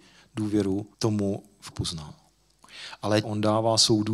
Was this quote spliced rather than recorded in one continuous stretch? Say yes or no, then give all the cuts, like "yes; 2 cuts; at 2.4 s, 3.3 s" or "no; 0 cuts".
yes; 3 cuts; at 0.9 s, 1.7 s, 3.2 s